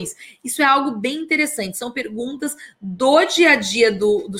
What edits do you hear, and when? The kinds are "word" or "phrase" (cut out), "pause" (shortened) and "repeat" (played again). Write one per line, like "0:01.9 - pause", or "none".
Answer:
none